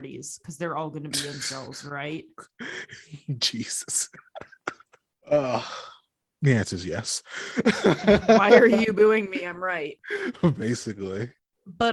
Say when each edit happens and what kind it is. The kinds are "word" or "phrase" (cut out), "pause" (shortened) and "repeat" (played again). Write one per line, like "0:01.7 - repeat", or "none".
none